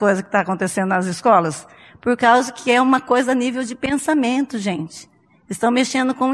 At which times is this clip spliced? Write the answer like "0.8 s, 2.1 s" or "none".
none